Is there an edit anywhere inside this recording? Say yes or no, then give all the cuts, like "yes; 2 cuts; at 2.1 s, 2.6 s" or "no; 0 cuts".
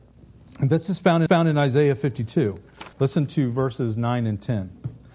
yes; 2 cuts; at 1.3 s, 2.9 s